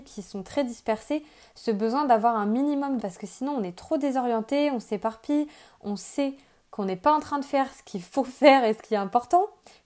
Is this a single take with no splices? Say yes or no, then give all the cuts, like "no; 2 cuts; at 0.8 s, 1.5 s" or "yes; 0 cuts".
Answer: no; 1 cut; at 3.0 s